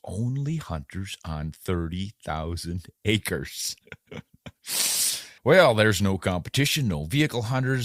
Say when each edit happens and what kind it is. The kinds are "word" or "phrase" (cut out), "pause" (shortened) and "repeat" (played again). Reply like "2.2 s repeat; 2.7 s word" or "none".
5.4 s pause